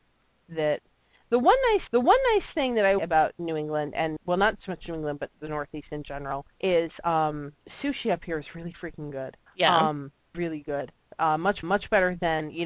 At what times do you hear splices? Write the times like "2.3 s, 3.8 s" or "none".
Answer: 1.9 s, 3.0 s, 4.2 s, 6.5 s, 7.6 s, 9.5 s, 10.3 s, 11.6 s